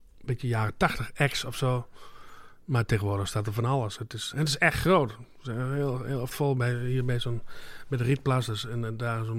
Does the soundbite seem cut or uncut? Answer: cut